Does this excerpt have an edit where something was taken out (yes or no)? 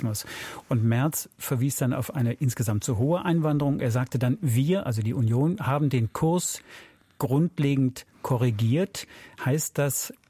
yes